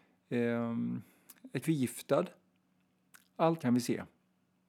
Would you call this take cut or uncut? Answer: cut